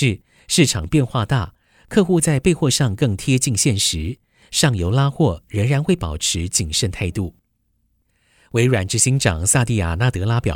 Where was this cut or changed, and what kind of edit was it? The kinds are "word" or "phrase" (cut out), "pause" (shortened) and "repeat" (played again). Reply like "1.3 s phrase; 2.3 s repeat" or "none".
none